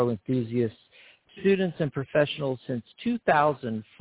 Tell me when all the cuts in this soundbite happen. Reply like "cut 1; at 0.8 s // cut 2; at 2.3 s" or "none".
none